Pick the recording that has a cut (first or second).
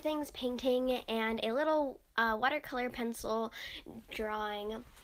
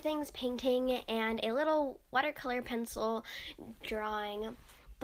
second